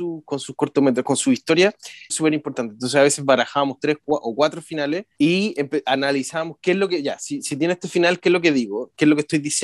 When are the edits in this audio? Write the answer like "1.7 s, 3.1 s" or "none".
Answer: 2.1 s, 5.1 s